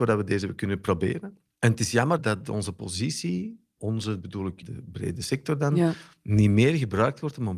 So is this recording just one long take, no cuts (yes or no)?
no